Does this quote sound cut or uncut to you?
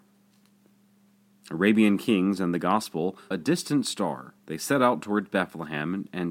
cut